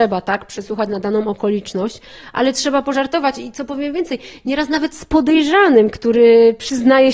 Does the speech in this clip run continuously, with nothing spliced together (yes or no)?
yes